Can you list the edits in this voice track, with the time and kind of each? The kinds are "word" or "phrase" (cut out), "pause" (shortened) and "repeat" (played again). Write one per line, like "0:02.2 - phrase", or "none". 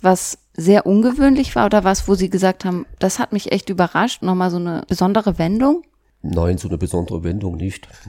none